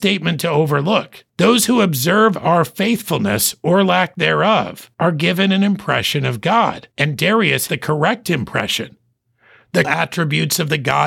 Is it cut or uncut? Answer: cut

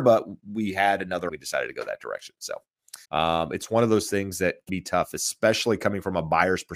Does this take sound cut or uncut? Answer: cut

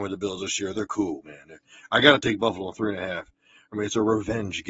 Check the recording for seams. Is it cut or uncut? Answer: uncut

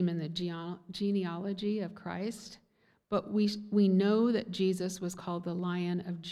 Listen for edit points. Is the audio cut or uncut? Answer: uncut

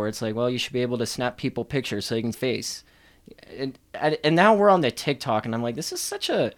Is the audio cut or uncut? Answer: cut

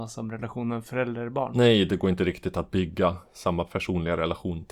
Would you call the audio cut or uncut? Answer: uncut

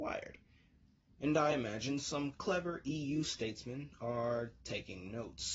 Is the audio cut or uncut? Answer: uncut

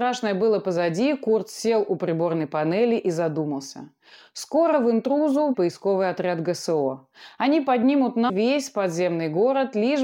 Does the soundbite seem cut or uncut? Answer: cut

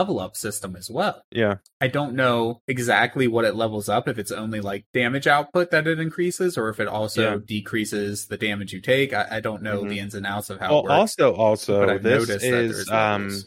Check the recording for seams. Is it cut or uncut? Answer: uncut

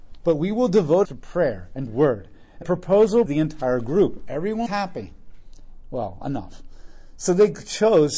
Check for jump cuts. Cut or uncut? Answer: cut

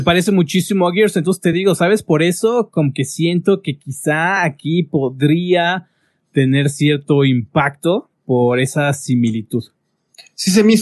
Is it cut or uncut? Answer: uncut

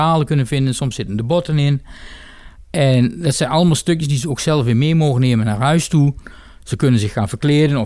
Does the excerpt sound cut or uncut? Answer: uncut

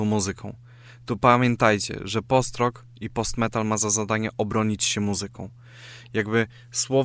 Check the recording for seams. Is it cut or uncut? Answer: uncut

